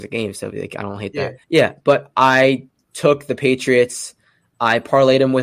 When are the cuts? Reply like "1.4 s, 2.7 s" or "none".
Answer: 1.4 s

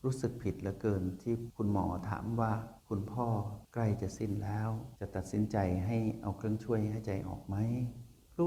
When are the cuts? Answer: 2.8 s, 4.9 s

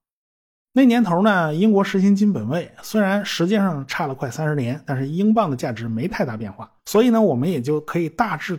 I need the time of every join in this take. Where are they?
6.8 s

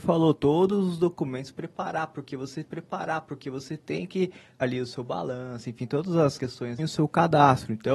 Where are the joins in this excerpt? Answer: 2.6 s, 4.6 s, 6.4 s, 6.8 s

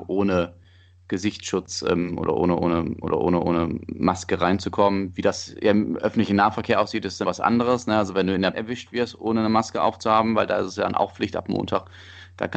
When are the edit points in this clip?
3.0 s, 7.2 s, 8.5 s

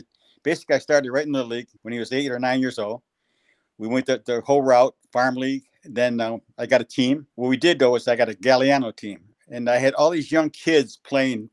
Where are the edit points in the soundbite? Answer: 1.8 s, 5.0 s, 7.3 s

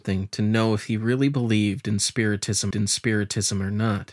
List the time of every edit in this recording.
2.7 s

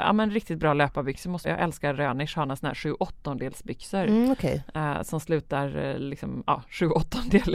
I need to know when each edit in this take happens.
1.4 s

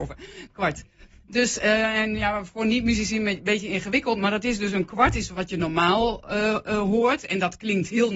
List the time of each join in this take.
none

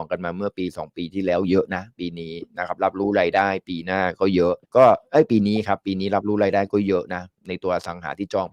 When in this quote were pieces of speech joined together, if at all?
4.6 s

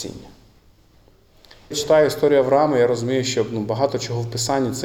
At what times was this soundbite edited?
1.7 s

